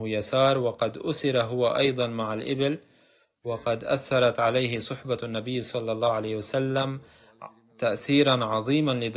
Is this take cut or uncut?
uncut